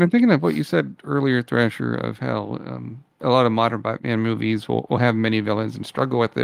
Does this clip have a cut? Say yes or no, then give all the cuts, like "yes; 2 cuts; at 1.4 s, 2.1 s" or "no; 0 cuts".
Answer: no; 0 cuts